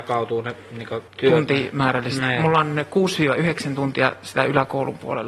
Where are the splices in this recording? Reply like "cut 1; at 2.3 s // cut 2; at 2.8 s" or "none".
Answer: cut 1; at 1.1 s